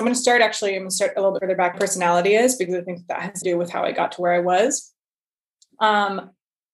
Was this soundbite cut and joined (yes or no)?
yes